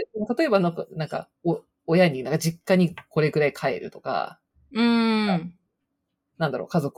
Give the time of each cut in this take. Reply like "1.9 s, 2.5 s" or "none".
1.4 s

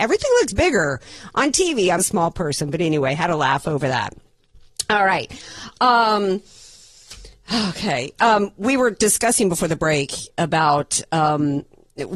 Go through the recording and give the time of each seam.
2.0 s

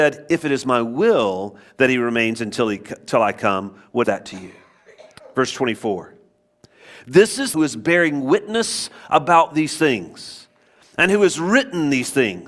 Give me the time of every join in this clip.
4.0 s, 7.5 s

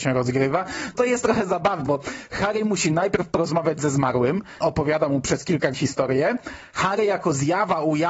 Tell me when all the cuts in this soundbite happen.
0.9 s, 1.9 s, 4.6 s, 5.7 s

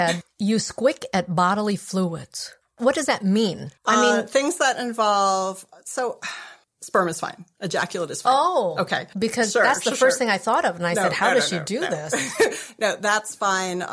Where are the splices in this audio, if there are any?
3.8 s, 6.7 s

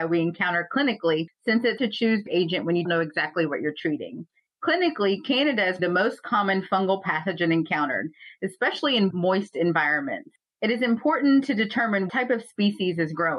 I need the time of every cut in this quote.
1.8 s, 2.3 s, 2.8 s, 5.8 s, 9.1 s, 12.1 s

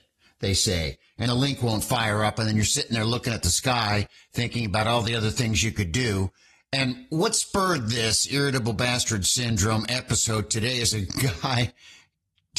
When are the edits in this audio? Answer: 1.3 s

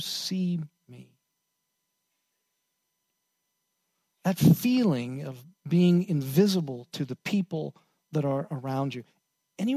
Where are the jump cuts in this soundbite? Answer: none

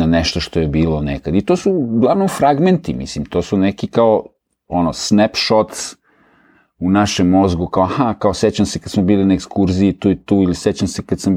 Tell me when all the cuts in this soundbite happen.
none

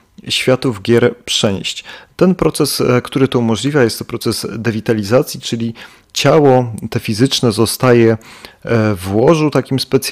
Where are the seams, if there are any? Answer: none

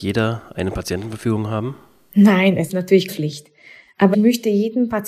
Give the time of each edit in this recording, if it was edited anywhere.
2.7 s, 3.1 s, 4.1 s

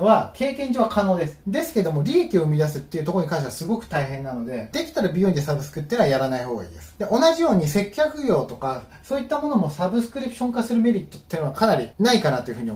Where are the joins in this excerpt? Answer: 4.7 s

